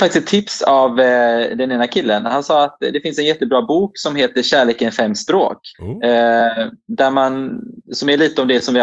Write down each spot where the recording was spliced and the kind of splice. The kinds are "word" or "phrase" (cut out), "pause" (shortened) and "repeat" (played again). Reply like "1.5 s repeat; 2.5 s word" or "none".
5.7 s pause